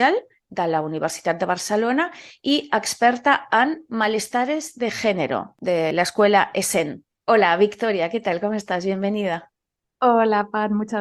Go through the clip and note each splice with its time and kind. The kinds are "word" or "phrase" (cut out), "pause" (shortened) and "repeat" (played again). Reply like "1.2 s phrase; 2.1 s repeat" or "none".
none